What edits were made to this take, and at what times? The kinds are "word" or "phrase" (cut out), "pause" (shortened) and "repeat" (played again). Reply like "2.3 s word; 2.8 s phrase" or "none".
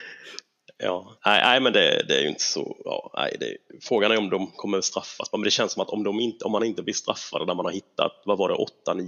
1.2 s pause